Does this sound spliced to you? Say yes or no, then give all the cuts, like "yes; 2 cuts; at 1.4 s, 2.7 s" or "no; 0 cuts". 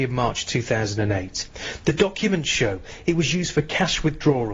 no; 0 cuts